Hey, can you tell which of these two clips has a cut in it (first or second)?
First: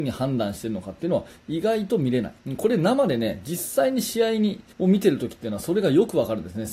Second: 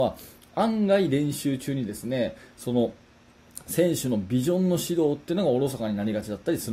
first